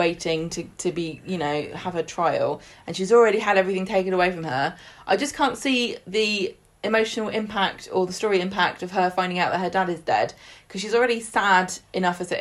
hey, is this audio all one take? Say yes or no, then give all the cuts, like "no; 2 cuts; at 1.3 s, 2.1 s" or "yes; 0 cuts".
yes; 0 cuts